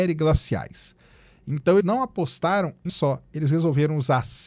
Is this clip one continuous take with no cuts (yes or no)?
no